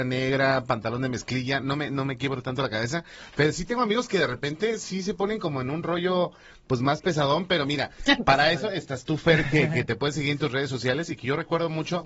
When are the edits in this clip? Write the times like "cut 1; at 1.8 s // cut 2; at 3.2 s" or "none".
none